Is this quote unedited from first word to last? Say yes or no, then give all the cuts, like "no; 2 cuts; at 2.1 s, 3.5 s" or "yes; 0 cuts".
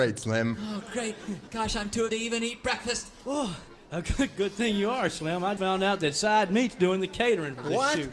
no; 2 cuts; at 2.1 s, 5.6 s